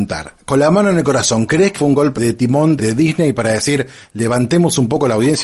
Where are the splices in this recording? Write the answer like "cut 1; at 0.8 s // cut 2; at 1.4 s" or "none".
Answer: cut 1; at 1.7 s // cut 2; at 2.1 s // cut 3; at 2.8 s